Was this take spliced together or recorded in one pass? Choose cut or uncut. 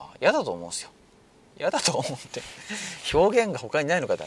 uncut